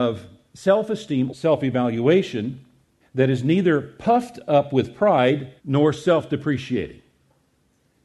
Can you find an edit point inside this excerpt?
yes; 3 cuts; at 1.3 s, 3.0 s, 5.6 s

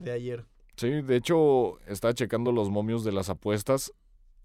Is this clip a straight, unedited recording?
yes; 0 cuts

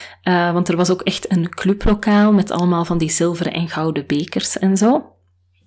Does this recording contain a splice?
no; 0 cuts

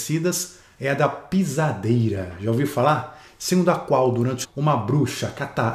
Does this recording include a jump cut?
yes; 1 cut; at 4.4 s

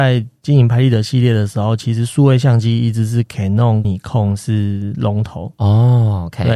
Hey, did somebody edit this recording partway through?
yes; 1 cut; at 3.8 s

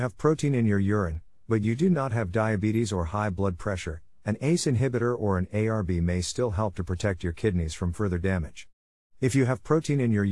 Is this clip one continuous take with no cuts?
yes; 0 cuts

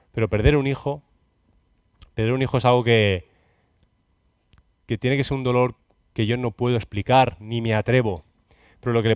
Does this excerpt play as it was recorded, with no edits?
yes; 0 cuts

